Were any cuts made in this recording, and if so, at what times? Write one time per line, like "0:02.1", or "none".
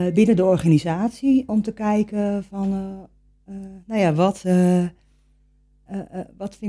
0:01.5